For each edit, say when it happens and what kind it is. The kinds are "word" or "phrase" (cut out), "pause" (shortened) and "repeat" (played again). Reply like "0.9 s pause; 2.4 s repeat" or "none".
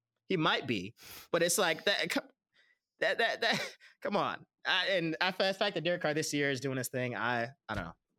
none